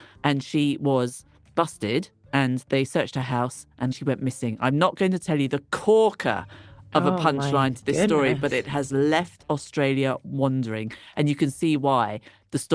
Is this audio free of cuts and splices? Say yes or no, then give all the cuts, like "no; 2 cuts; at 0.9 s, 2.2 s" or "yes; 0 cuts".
no; 1 cut; at 3.9 s